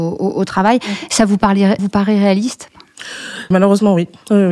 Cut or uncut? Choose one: cut